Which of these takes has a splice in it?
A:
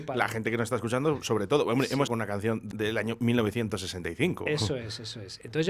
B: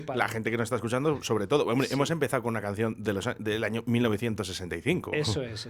A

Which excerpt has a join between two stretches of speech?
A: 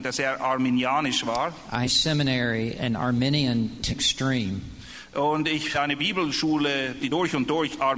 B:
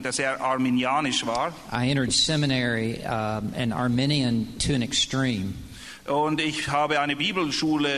A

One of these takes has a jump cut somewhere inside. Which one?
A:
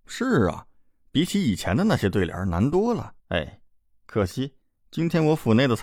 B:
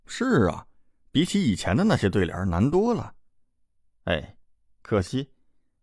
A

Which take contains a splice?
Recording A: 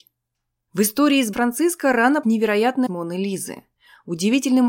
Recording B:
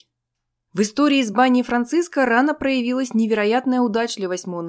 A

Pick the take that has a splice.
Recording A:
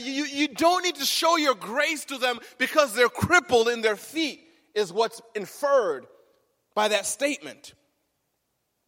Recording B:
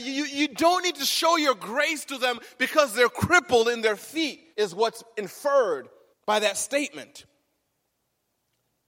B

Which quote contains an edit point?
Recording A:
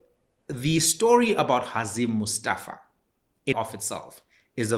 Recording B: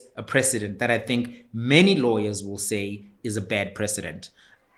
A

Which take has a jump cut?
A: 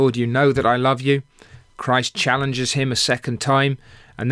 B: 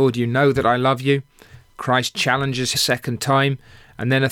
B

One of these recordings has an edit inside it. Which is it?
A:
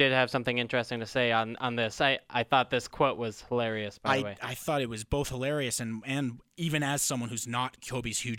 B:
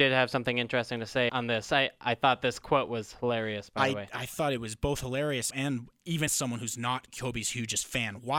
B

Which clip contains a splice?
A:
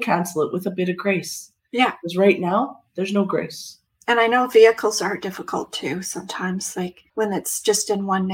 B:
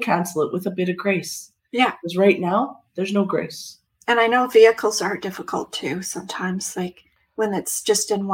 A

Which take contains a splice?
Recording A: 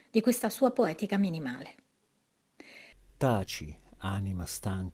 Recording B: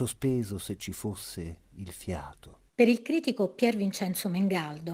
B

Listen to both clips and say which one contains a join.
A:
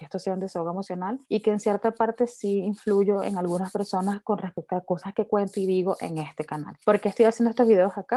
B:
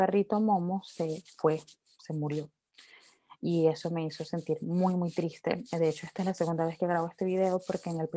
A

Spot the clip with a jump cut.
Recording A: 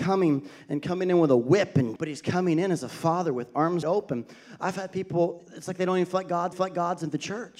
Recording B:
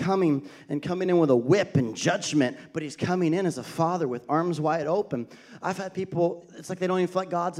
A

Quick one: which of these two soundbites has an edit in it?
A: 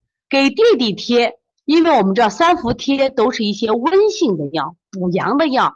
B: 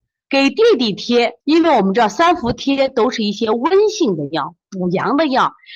B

